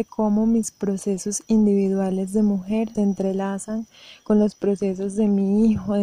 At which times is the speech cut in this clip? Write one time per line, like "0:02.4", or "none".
0:02.9

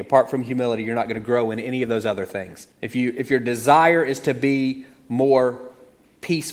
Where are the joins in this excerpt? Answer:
0:02.7

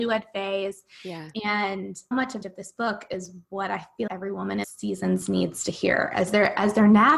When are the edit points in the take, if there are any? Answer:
0:02.1
0:02.4
0:04.1
0:04.6

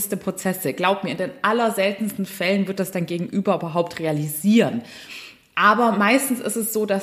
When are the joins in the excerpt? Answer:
none

